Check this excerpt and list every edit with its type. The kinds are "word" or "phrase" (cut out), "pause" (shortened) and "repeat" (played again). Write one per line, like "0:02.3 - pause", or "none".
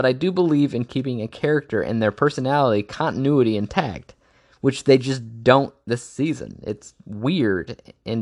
none